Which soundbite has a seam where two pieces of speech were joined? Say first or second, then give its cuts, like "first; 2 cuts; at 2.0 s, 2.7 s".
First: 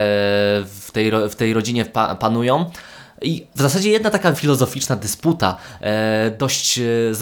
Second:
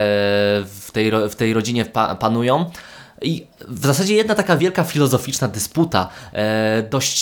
first; 2 cuts; at 3.6 s, 4.3 s